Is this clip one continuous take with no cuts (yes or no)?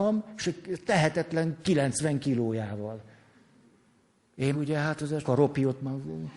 no